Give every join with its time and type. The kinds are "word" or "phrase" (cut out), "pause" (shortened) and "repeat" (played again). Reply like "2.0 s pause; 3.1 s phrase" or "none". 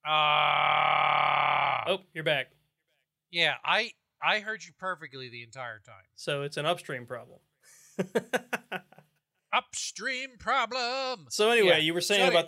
none